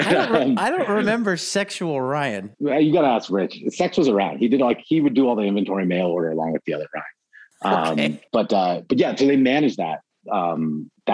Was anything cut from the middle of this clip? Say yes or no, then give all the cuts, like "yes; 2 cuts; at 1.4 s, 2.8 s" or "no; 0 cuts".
no; 0 cuts